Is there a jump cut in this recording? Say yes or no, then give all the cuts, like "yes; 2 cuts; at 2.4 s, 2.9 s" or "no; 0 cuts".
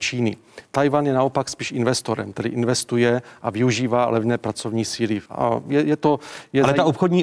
yes; 1 cut; at 5.3 s